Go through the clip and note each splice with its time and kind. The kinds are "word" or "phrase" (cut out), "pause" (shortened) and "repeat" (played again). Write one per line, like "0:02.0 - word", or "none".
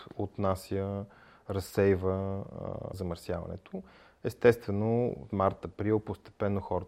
0:02.9 - word
0:05.3 - word